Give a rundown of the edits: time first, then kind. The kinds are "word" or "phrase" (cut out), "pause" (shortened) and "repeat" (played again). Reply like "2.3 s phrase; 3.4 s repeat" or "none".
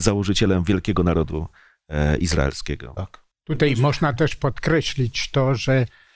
3.3 s pause